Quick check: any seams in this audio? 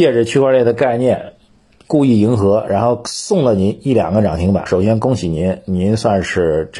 yes; 1 cut; at 4.7 s

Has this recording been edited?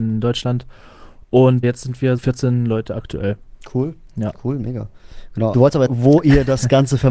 yes; 4 cuts; at 1.6 s, 2.2 s, 5.5 s, 5.9 s

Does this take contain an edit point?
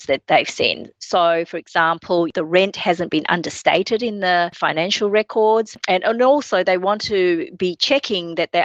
no; 0 cuts

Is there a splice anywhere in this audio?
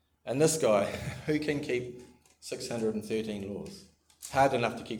no; 0 cuts

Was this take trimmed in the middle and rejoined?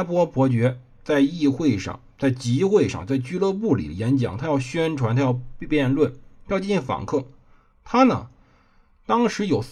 no; 0 cuts

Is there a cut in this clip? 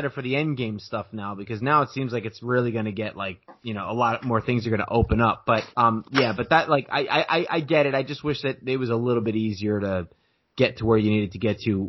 yes; 1 cut; at 5.7 s

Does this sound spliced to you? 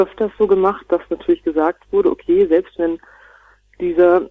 no; 0 cuts

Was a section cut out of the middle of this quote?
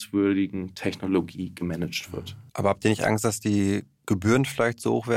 yes; 1 cut; at 2.5 s

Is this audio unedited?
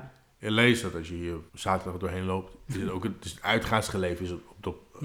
no; 1 cut; at 1.5 s

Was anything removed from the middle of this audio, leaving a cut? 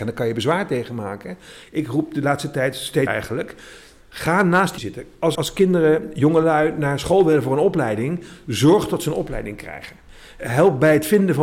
yes; 4 cuts; at 3.1 s, 4.8 s, 5.3 s, 10.4 s

